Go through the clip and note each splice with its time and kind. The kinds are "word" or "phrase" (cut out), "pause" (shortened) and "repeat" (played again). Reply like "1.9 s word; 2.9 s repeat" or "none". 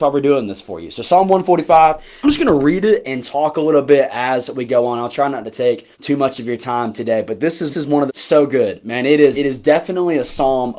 2.2 s word; 3.0 s word; 5.9 s pause; 7.7 s repeat; 8.1 s phrase; 9.3 s word